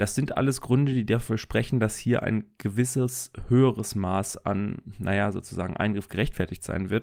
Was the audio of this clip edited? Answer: no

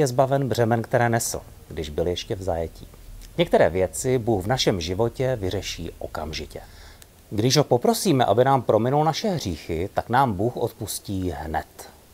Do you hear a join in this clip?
no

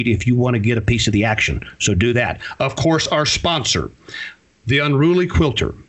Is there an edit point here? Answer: no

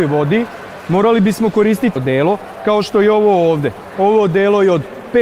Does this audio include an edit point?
yes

